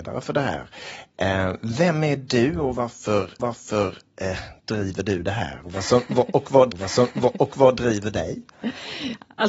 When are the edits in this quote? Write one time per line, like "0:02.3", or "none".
0:03.4
0:06.7

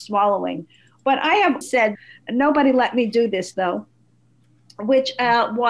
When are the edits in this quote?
0:01.6
0:01.9

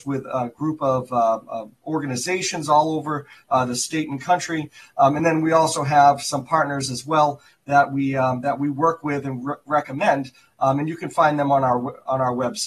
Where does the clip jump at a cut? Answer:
none

